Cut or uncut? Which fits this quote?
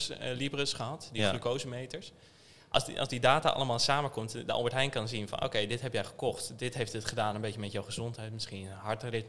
uncut